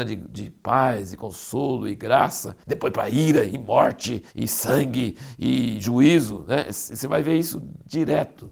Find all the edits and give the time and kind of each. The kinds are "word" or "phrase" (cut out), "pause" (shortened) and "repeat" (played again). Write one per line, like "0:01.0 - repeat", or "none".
0:02.6 - pause
0:04.3 - pause